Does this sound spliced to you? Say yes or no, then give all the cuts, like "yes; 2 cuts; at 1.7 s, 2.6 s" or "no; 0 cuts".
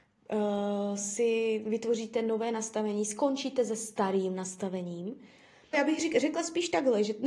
yes; 1 cut; at 5.7 s